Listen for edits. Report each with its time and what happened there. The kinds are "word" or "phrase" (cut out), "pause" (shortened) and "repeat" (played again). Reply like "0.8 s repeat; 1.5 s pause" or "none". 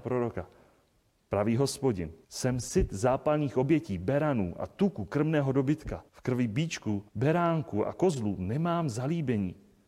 2.2 s pause; 6.1 s pause; 7.1 s pause